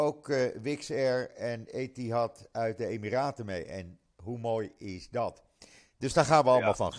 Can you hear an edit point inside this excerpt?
no; 0 cuts

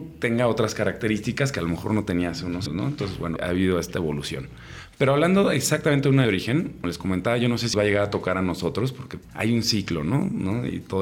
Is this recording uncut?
no; 6 cuts; at 2.7 s, 3.4 s, 6.2 s, 6.8 s, 7.7 s, 9.3 s

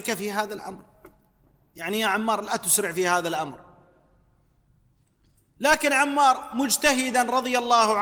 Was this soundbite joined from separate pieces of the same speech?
no; 0 cuts

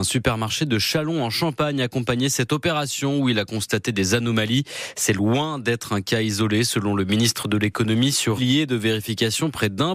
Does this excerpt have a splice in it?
yes; 1 cut; at 8.4 s

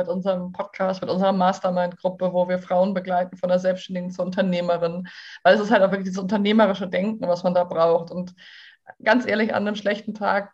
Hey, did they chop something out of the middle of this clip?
no; 0 cuts

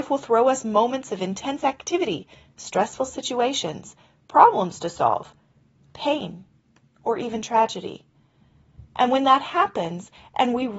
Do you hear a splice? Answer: no; 0 cuts

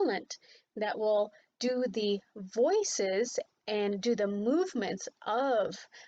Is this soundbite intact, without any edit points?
yes; 0 cuts

